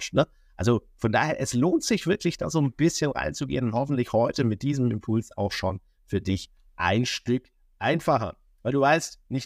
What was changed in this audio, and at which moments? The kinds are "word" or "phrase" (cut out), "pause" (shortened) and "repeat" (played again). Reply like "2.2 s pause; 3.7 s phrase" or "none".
none